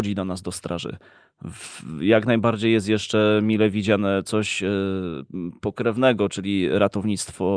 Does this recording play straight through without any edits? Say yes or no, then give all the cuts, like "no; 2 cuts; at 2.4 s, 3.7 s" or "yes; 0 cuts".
yes; 0 cuts